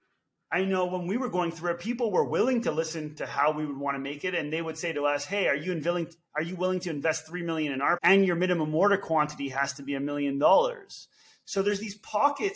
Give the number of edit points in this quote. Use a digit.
1